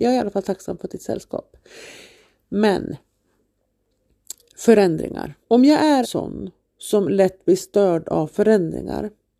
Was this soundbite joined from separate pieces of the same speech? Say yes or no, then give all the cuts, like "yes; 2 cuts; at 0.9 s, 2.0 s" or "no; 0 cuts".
yes; 2 cuts; at 5.4 s, 6.0 s